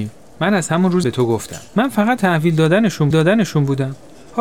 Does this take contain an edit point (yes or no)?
yes